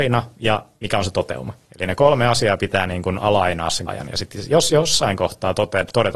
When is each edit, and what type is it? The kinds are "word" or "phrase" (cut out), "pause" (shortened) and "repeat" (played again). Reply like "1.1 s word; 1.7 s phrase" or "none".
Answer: 3.9 s word

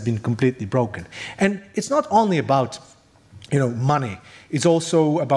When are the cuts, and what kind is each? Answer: none

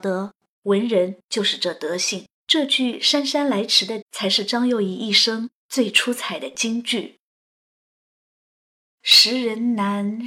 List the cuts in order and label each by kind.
2.3 s pause; 4.0 s word

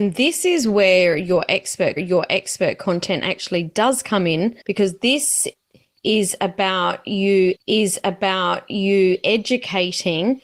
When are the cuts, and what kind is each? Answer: 2.0 s repeat; 4.6 s pause; 7.6 s repeat

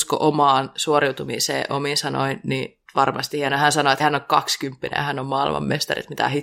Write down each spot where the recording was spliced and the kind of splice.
1.7 s phrase; 2.9 s pause; 4.0 s word

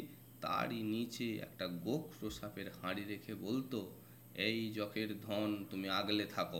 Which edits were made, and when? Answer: none

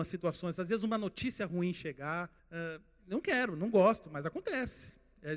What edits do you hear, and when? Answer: 2.4 s pause

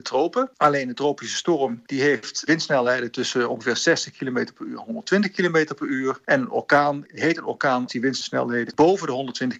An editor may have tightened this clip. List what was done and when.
2.5 s word; 7.9 s word; 8.7 s word

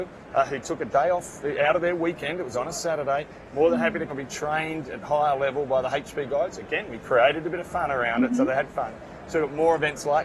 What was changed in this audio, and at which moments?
4.1 s phrase

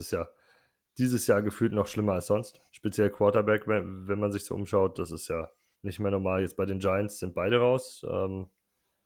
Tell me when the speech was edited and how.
2.7 s pause; 5.7 s pause

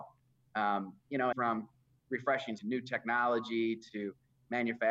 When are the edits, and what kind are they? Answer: 1.3 s phrase; 2.6 s word

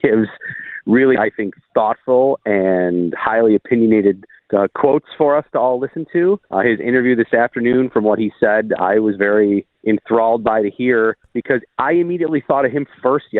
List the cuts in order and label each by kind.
4.4 s pause; 6.5 s pause; 9.7 s pause; 11.2 s pause

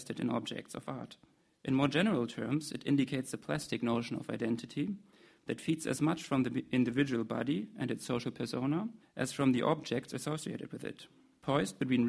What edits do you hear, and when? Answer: none

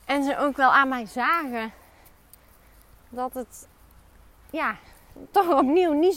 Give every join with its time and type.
none

